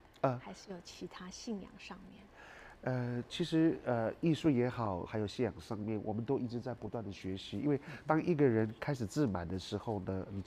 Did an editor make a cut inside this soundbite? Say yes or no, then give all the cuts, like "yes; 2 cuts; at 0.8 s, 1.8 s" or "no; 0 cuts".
yes; 1 cut; at 5.1 s